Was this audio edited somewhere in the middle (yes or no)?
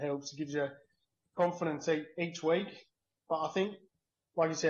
no